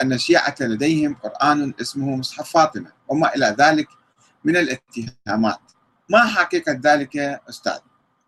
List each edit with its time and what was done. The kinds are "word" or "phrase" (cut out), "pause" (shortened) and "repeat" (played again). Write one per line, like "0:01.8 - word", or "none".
none